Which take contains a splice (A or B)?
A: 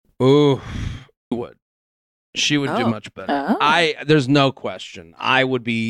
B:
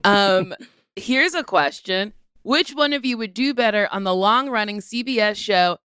A